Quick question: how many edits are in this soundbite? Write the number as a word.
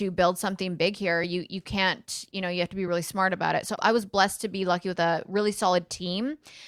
zero